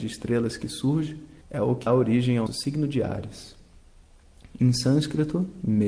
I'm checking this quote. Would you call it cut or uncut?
cut